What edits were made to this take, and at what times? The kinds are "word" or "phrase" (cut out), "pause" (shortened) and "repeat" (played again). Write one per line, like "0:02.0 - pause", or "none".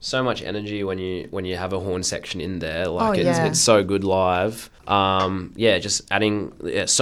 0:04.8 - pause